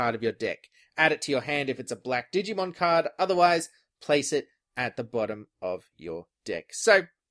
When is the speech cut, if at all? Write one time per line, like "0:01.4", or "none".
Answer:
none